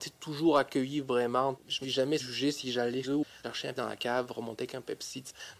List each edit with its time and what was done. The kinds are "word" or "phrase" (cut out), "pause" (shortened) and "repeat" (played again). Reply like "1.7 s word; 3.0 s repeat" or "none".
1.8 s word; 2.2 s word; 3.0 s word; 3.4 s word; 3.7 s word